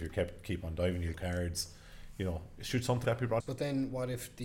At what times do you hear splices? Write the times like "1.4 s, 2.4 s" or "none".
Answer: 1.1 s, 3.0 s, 3.4 s

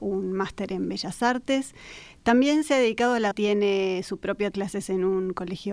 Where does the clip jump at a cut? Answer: 3.3 s, 4.5 s

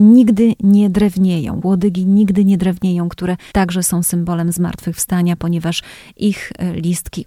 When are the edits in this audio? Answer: 1.6 s, 3.5 s

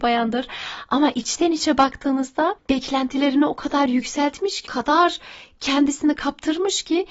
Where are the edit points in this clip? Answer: 2.6 s, 4.7 s

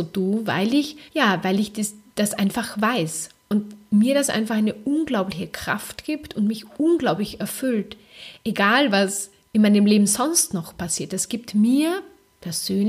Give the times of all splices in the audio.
1.1 s

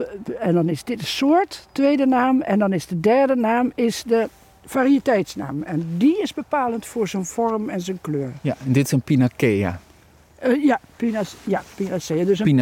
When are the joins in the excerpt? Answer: none

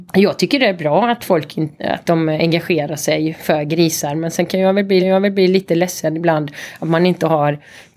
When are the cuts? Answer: 5.0 s

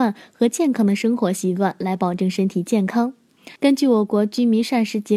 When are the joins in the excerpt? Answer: 3.6 s

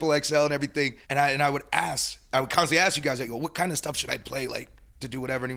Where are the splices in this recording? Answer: 1.0 s

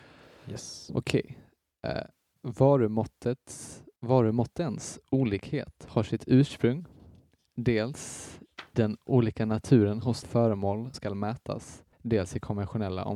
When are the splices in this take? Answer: 4.0 s, 8.7 s, 10.2 s, 10.9 s, 11.9 s

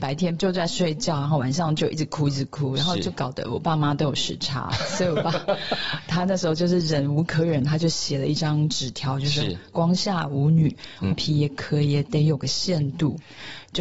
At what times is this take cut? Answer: 11.1 s

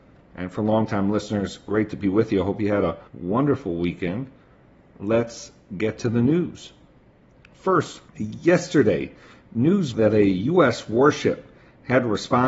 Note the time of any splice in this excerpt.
3.1 s, 8.1 s, 9.9 s

